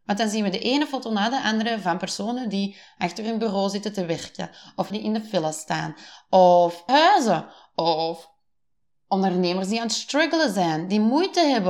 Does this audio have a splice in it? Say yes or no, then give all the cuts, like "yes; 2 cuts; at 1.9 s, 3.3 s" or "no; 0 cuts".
yes; 2 cuts; at 4.9 s, 6.9 s